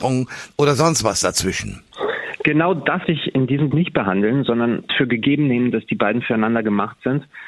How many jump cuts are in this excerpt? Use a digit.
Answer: 3